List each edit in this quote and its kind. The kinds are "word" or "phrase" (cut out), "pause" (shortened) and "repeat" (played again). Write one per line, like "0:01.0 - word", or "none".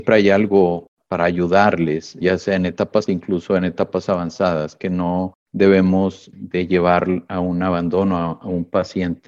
0:02.2 - word
0:03.1 - word
0:06.3 - word